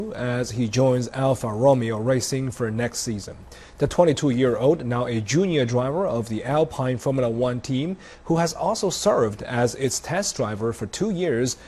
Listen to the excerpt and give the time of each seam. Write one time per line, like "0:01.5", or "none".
none